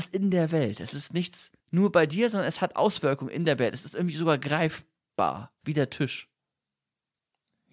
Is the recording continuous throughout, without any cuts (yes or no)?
no